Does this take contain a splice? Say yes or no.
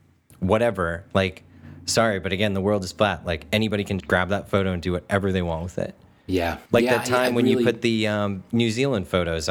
yes